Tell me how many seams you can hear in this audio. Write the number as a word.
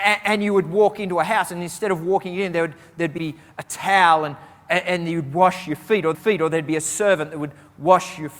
two